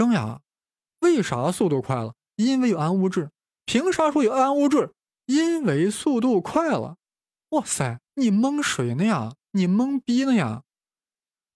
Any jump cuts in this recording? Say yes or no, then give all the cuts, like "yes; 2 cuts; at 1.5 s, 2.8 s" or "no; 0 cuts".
yes; 1 cut; at 8.1 s